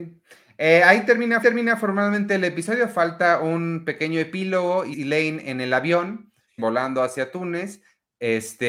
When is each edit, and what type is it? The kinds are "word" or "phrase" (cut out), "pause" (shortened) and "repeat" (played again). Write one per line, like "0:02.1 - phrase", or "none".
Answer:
0:01.4 - repeat
0:04.9 - word
0:06.6 - word